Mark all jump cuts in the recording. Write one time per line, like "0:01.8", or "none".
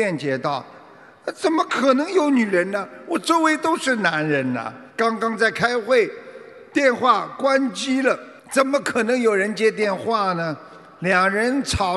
0:04.9
0:08.4